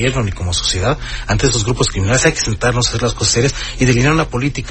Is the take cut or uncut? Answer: uncut